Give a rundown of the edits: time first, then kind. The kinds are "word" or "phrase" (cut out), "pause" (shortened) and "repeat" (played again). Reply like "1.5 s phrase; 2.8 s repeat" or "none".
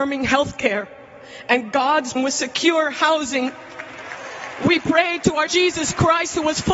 2.2 s word; 5.5 s word